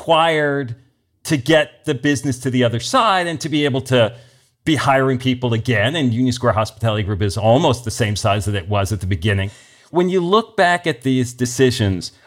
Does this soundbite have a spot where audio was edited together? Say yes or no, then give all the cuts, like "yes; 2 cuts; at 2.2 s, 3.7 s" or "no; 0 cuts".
no; 0 cuts